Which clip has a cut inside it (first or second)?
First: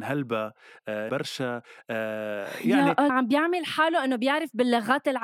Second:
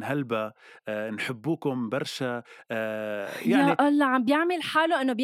first